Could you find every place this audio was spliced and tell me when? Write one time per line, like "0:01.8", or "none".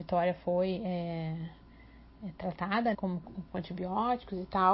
0:02.9
0:03.5

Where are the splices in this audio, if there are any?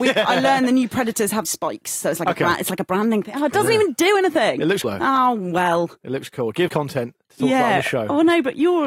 0:01.4
0:04.8
0:06.7

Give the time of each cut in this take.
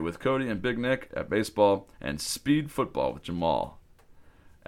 0:01.9

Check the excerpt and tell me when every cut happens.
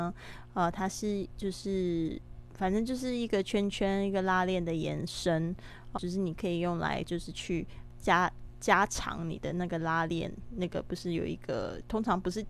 0:06.0

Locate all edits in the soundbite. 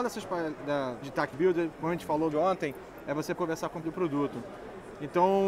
0:01.0
0:01.3
0:02.3
0:03.3
0:03.8

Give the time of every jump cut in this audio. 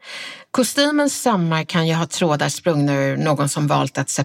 none

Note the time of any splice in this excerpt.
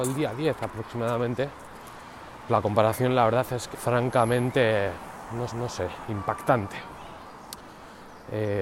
0:02.5
0:03.7
0:05.5

